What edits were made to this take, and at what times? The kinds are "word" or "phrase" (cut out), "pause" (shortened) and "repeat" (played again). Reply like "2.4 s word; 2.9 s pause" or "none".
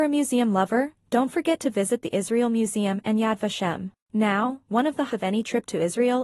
4.0 s pause; 5.1 s word